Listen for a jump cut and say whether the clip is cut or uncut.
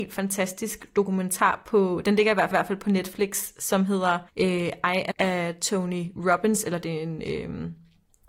cut